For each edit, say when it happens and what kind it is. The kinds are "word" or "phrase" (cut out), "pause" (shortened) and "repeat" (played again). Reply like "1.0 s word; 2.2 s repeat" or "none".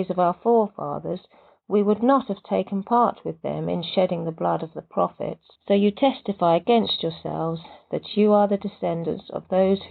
5.5 s pause